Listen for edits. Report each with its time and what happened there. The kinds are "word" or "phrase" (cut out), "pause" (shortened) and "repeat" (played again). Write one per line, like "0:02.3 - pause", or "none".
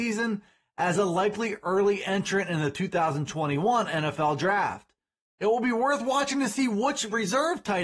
none

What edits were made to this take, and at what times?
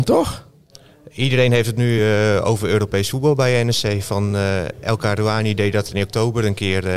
none

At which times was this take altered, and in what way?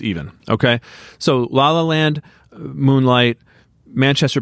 none

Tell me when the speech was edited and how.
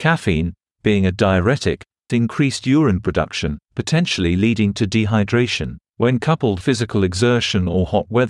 0:02.1 - word
0:03.6 - pause
0:05.9 - pause
0:06.6 - word

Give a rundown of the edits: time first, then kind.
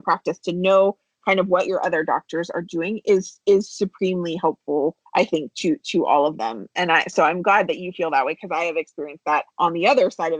0:05.1 - pause
0:09.5 - pause

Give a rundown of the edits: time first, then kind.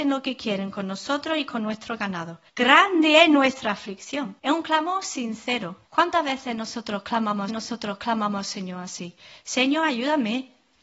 0:02.5 - pause
0:04.4 - pause
0:05.9 - pause
0:07.5 - repeat

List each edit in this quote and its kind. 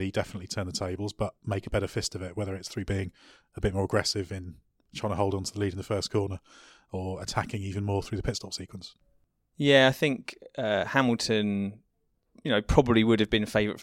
none

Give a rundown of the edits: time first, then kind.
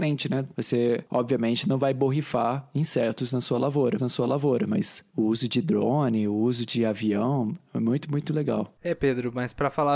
0:04.0 - repeat

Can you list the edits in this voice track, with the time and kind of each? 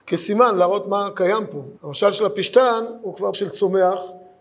0:01.8 - pause
0:03.3 - word

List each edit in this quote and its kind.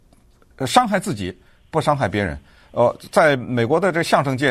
none

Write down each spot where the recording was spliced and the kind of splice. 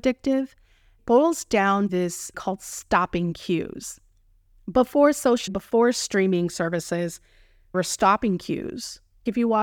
0:01.0 - word
0:01.9 - word
0:02.3 - word
0:05.5 - word
0:07.7 - word

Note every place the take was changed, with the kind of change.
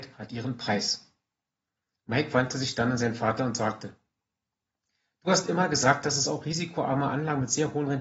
none

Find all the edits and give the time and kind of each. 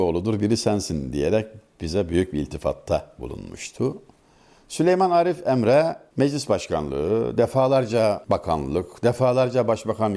none

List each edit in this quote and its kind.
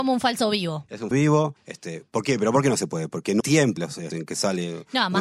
0:01.1 - word
0:01.6 - pause
0:03.4 - word
0:03.8 - phrase
0:04.1 - word

